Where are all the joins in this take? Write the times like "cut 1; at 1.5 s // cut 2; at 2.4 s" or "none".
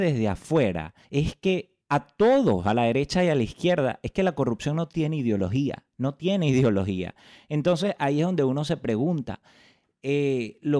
cut 1; at 1.0 s // cut 2; at 1.8 s // cut 3; at 5.9 s